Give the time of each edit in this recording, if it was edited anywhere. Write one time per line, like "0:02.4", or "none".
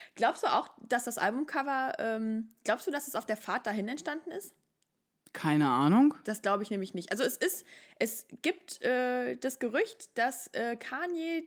none